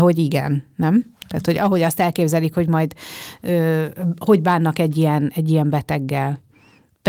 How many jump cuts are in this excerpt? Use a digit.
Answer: 0